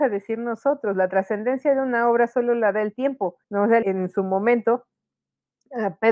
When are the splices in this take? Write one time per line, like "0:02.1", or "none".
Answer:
0:03.4
0:03.8